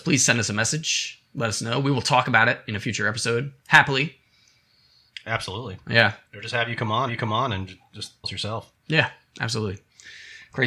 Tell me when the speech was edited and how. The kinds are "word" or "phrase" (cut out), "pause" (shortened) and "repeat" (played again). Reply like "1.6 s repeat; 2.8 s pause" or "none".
6.2 s pause; 7.1 s repeat; 8.2 s word